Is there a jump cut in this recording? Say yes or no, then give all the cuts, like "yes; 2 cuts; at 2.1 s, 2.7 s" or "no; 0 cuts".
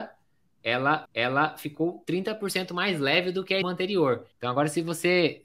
yes; 3 cuts; at 1.0 s, 3.6 s, 4.3 s